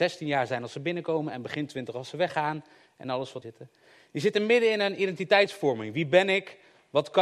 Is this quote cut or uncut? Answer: cut